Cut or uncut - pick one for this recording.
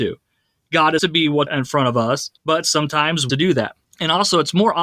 cut